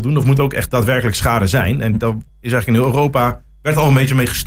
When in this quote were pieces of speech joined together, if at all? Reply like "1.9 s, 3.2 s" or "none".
2.3 s